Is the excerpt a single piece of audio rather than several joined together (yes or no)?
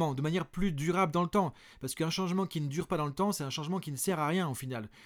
yes